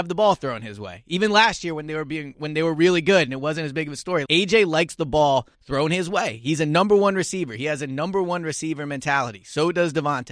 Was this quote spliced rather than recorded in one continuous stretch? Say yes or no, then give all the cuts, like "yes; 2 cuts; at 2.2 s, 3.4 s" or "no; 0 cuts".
yes; 2 cuts; at 4.3 s, 5.5 s